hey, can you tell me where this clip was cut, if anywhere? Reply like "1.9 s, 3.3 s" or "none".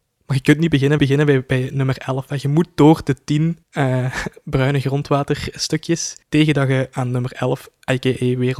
1.0 s, 3.6 s, 6.2 s